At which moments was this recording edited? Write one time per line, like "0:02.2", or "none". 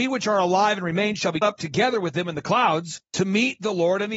0:01.4
0:03.1